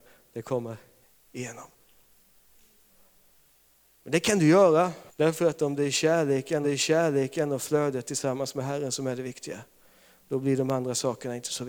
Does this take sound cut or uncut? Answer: cut